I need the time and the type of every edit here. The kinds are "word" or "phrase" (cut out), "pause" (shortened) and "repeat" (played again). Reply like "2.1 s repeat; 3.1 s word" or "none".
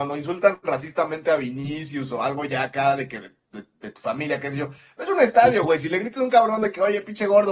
none